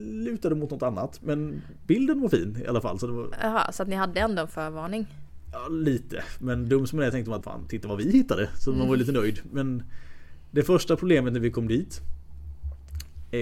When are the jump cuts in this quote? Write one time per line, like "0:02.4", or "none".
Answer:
0:07.4